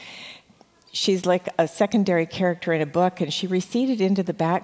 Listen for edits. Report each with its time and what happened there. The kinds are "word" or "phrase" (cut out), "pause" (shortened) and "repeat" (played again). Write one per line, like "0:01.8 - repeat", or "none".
none